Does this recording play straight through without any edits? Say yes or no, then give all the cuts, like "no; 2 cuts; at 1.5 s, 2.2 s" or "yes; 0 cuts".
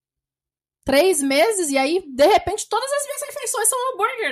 yes; 0 cuts